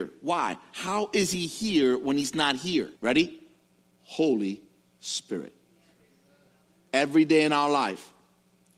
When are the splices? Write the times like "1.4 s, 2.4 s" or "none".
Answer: 3.0 s